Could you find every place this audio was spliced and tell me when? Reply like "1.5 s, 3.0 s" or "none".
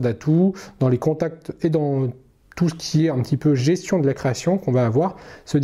none